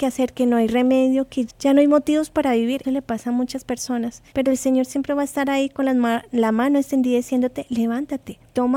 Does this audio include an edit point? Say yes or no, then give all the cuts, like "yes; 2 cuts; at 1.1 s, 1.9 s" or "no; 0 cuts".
yes; 3 cuts; at 1.5 s, 2.8 s, 4.3 s